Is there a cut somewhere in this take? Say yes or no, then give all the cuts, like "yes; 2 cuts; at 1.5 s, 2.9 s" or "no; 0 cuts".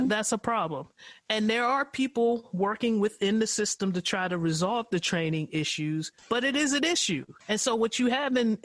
yes; 2 cuts; at 6.2 s, 7.4 s